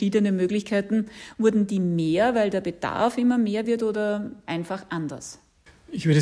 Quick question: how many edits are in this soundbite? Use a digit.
0